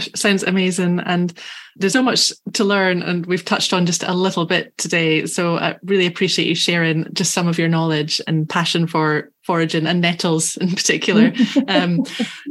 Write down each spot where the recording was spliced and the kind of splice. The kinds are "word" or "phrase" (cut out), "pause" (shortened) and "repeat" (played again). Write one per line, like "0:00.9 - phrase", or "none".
0:01.9 - word